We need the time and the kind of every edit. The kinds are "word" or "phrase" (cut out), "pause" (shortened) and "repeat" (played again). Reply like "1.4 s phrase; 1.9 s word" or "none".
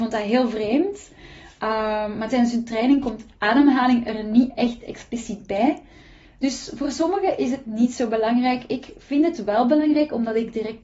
none